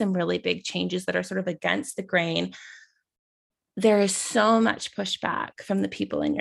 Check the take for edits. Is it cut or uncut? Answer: uncut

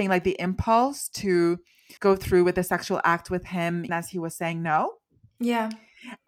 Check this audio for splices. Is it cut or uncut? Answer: cut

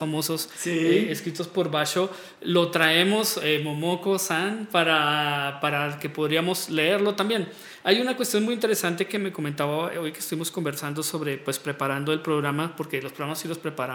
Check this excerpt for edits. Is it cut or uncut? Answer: uncut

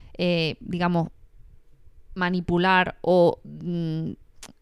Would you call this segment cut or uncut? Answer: uncut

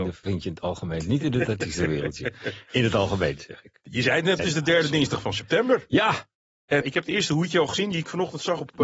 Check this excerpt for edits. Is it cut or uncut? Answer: cut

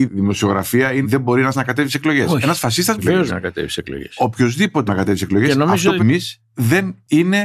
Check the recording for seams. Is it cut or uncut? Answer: cut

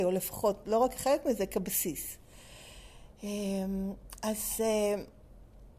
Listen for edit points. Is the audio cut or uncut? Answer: uncut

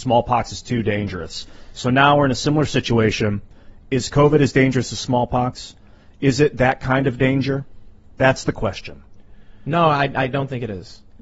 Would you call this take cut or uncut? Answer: uncut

